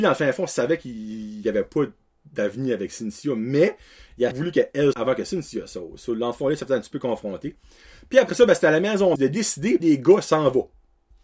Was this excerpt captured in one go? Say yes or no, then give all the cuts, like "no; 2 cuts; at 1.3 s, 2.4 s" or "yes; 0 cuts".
no; 4 cuts; at 4.3 s, 4.9 s, 9.2 s, 9.8 s